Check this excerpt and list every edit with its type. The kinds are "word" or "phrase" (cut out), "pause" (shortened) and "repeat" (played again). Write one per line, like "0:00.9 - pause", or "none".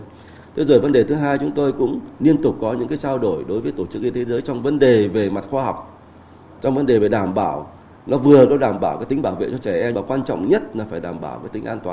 0:09.9 - word